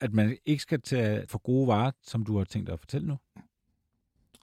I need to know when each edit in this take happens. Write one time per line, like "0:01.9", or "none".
0:01.3